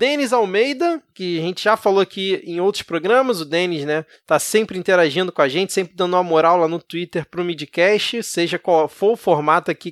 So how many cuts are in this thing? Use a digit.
0